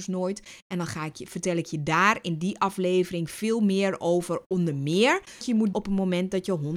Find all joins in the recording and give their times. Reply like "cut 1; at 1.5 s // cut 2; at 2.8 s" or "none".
cut 1; at 5.4 s // cut 2; at 5.7 s